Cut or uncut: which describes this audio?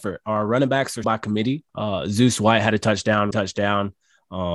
cut